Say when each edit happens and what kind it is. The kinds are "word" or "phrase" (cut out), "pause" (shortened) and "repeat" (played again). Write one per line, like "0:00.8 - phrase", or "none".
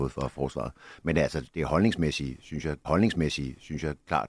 0:02.8 - repeat